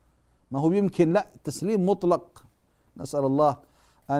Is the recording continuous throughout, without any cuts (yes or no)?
yes